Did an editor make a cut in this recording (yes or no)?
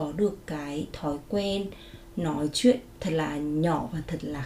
no